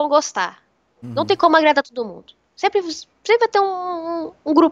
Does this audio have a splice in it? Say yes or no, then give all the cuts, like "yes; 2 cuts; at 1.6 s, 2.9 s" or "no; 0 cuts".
no; 0 cuts